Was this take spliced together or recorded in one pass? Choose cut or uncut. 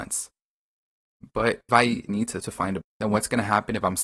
cut